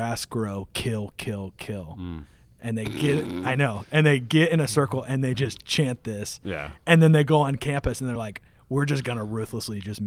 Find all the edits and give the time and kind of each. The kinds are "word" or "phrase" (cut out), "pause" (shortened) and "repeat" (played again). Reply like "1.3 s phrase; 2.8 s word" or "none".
none